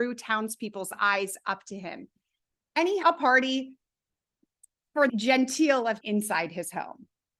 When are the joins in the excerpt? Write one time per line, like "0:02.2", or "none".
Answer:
0:03.0
0:05.1
0:06.0